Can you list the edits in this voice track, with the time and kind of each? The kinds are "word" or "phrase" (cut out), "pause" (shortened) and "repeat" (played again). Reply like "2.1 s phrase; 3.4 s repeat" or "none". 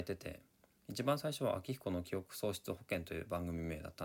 none